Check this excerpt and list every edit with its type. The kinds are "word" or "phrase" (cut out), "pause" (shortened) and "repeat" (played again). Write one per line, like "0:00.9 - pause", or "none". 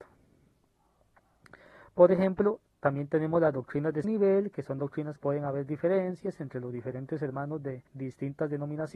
0:04.0 - word
0:05.2 - word
0:07.9 - pause